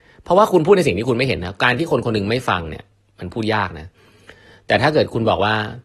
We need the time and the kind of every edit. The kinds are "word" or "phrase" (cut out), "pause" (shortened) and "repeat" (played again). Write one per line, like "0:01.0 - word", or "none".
none

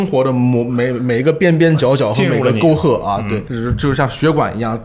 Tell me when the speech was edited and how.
0:03.5 - word

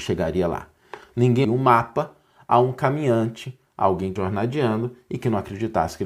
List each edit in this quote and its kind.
0:01.4 - word
0:04.2 - word

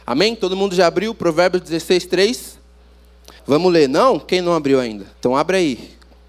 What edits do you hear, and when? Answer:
0:03.4 - pause
0:05.1 - pause

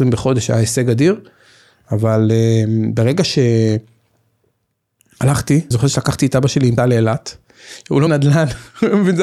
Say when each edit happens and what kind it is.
0:05.7 - word
0:06.8 - word
0:08.1 - word

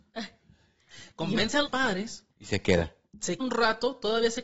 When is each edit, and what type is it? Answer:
0:01.7 - word
0:02.3 - pause
0:03.4 - word

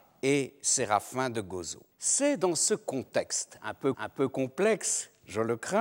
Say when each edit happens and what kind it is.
0:01.9 - pause
0:03.9 - repeat

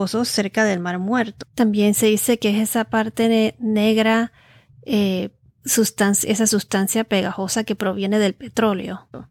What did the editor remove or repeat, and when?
none

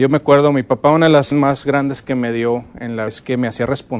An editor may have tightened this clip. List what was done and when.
0:01.3 - word
0:03.1 - word

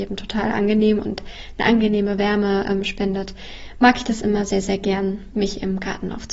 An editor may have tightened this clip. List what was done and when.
none

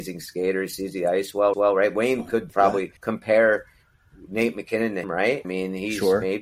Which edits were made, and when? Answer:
0:01.5 - repeat
0:02.5 - word
0:03.0 - pause
0:05.0 - word
0:05.4 - word

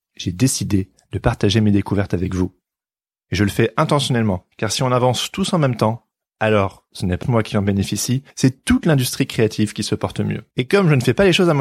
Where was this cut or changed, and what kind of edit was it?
0:04.5 - pause
0:07.2 - word
0:08.3 - pause
0:10.5 - pause

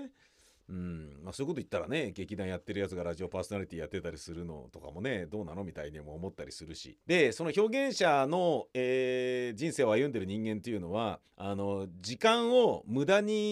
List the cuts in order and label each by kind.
0:07.0 - pause
0:11.3 - pause

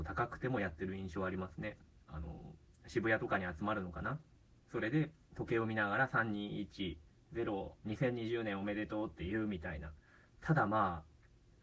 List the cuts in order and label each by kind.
none

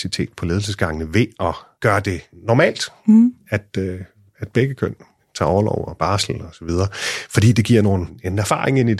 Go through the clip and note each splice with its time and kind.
none

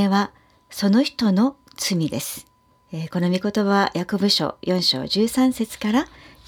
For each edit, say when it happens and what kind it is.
0:02.7 - pause

